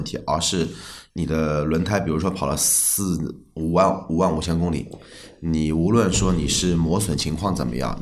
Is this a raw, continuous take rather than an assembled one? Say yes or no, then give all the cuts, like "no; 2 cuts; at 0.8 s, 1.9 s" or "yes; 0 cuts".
no; 1 cut; at 1.1 s